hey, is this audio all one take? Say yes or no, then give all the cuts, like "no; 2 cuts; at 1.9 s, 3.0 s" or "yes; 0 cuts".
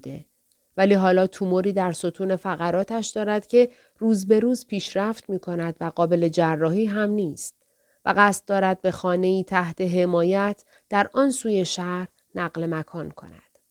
yes; 0 cuts